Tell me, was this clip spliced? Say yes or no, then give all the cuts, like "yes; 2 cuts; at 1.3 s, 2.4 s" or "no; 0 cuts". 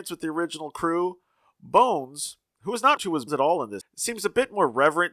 yes; 3 cuts; at 3.0 s, 3.3 s, 3.8 s